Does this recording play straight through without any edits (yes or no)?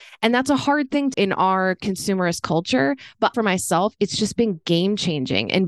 no